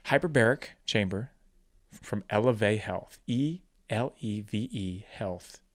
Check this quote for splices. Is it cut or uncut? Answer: cut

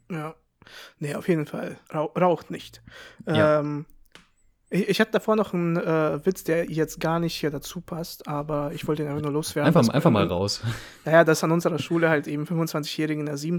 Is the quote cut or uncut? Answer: cut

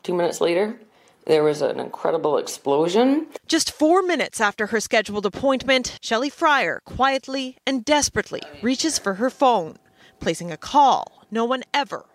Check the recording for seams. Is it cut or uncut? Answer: uncut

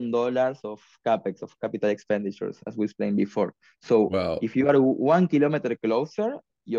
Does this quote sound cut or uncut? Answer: uncut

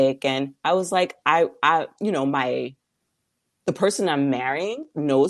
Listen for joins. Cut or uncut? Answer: uncut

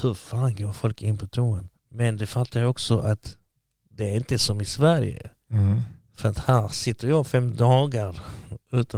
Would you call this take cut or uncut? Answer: cut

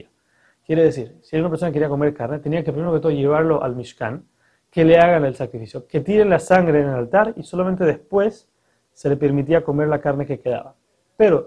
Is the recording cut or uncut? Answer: uncut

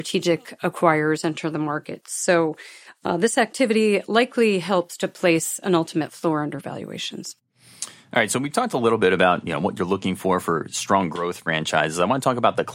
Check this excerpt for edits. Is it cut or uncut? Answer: uncut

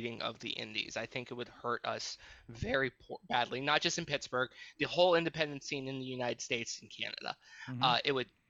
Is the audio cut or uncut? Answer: uncut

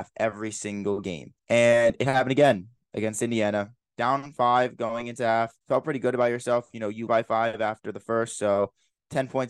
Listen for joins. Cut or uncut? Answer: cut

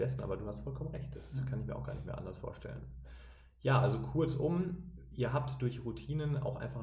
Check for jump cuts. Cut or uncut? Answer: uncut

